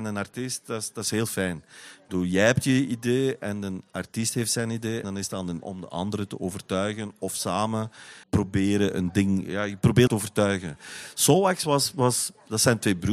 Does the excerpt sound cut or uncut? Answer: cut